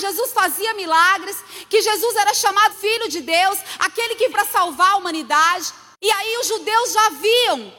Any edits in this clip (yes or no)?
yes